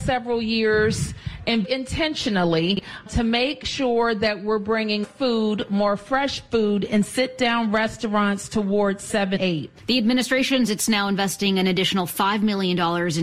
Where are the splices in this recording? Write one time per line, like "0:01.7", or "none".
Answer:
0:01.6
0:03.1
0:05.0
0:09.4
0:10.7